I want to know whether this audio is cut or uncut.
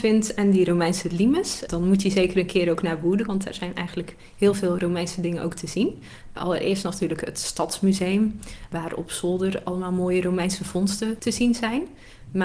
cut